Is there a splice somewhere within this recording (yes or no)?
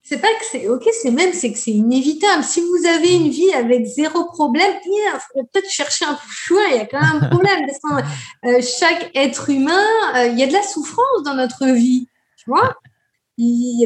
no